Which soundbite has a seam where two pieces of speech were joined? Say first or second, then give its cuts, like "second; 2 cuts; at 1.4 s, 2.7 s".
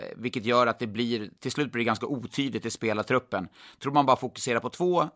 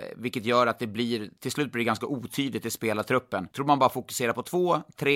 second; 1 cut; at 3.5 s